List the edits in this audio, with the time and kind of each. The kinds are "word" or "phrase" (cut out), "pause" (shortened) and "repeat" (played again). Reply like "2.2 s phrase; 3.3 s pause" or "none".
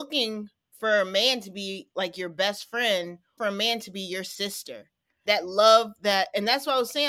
3.4 s phrase; 5.3 s word